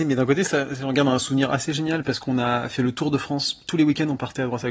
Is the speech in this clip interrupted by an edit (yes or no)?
no